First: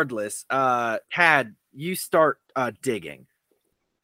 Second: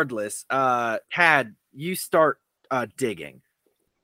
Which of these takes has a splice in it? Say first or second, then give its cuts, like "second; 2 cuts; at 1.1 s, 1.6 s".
first; 1 cut; at 2.4 s